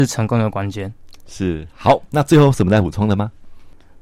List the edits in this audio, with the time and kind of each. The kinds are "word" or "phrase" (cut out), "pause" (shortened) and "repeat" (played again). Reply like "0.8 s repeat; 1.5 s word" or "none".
none